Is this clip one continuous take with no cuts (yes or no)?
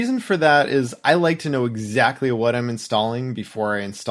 yes